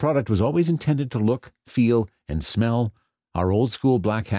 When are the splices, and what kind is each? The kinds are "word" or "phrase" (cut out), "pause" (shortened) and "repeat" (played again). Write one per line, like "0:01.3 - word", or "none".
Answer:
none